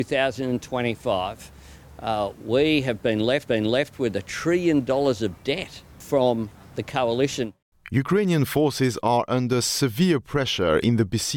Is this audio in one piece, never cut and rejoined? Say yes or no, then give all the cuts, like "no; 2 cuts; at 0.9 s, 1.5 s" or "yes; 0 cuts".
no; 1 cut; at 3.5 s